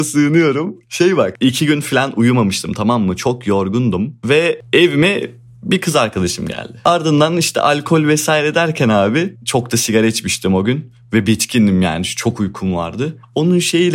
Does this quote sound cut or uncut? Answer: uncut